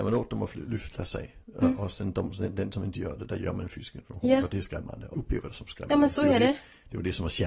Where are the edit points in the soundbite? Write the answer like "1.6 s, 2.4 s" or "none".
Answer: 5.1 s